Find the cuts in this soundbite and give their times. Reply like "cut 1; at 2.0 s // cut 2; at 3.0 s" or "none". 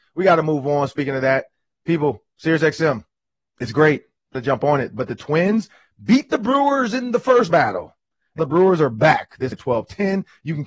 cut 1; at 4.3 s // cut 2; at 7.5 s // cut 3; at 8.4 s // cut 4; at 9.5 s